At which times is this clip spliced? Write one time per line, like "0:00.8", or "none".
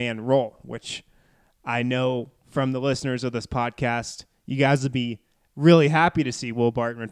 none